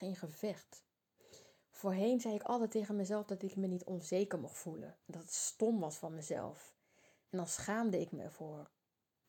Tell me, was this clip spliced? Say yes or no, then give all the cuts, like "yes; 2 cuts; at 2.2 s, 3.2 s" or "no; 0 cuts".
no; 0 cuts